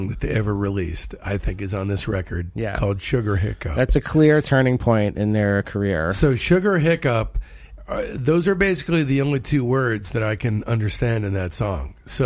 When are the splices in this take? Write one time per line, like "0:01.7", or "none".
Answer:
none